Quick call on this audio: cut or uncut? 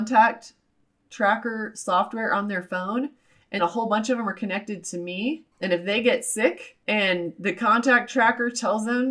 cut